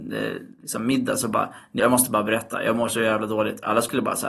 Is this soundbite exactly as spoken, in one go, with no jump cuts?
no; 1 cut; at 1.8 s

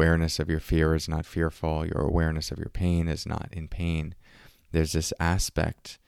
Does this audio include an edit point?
no; 0 cuts

